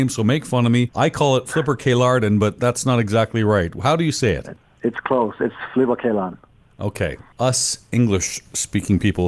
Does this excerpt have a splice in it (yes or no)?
no